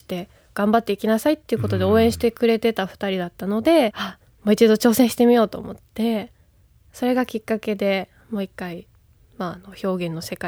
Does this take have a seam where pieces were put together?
yes; 1 cut; at 3.9 s

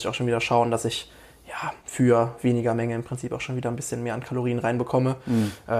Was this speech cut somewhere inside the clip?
yes; 1 cut; at 1.8 s

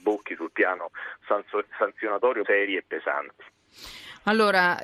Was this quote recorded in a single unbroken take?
no; 1 cut; at 2.4 s

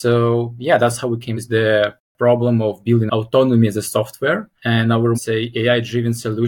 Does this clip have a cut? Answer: yes; 3 cuts; at 1.3 s, 4.6 s, 5.1 s

